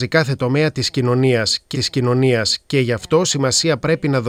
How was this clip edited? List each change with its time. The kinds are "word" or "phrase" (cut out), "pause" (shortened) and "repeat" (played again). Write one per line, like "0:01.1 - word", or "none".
0:01.7 - repeat